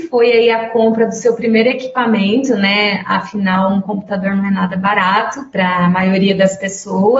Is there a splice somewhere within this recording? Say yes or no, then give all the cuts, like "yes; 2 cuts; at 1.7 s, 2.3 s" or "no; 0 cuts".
no; 0 cuts